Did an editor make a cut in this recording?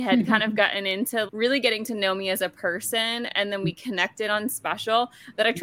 yes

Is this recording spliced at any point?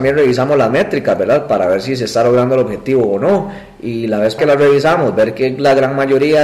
yes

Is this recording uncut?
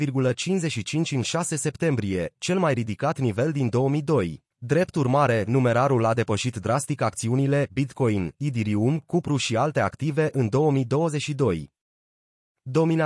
no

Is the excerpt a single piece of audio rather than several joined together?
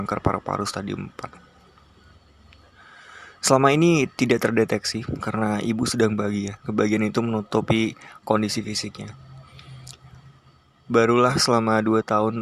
yes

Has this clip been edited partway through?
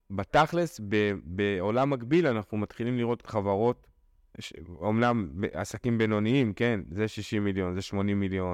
yes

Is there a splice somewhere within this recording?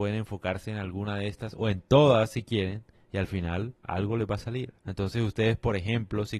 yes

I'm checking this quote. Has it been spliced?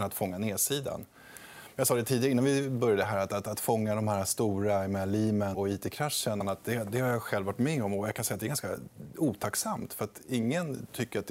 yes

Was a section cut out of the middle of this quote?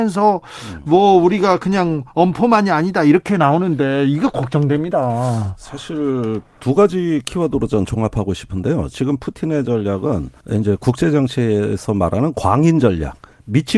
yes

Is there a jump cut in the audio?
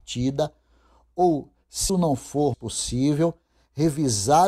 yes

